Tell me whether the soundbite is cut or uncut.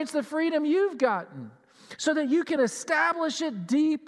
uncut